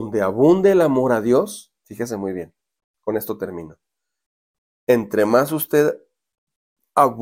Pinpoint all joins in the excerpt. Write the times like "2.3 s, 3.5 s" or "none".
none